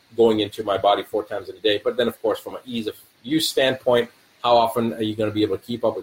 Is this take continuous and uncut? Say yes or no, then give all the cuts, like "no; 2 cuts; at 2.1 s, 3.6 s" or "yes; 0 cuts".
yes; 0 cuts